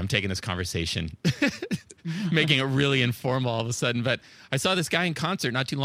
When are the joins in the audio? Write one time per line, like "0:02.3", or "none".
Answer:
none